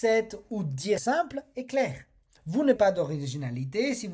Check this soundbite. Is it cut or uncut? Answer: cut